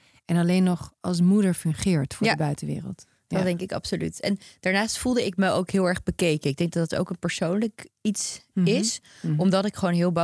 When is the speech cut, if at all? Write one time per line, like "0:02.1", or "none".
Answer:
none